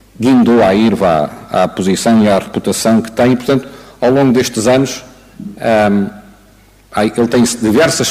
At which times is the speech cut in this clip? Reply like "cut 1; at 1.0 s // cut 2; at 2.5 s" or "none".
none

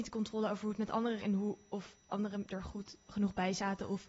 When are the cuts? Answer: cut 1; at 1.2 s // cut 2; at 2.0 s

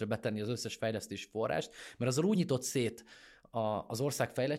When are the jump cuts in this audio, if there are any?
none

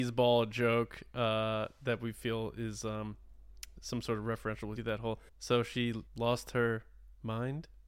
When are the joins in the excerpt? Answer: cut 1; at 4.8 s // cut 2; at 5.3 s // cut 3; at 6.1 s

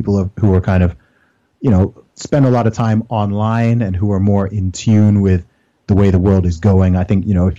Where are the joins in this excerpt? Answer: none

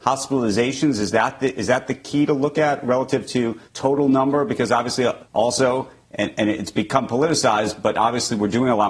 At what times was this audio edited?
cut 1; at 3.7 s // cut 2; at 5.2 s

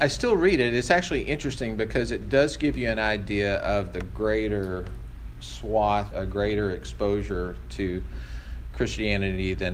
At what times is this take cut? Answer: cut 1; at 6.1 s

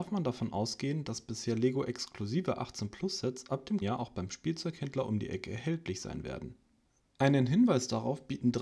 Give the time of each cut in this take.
cut 1; at 3.8 s

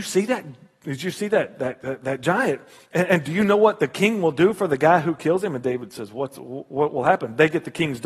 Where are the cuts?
none

